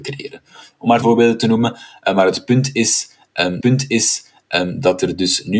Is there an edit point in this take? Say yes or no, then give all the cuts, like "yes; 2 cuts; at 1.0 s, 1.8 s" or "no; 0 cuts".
yes; 2 cuts; at 1.0 s, 3.6 s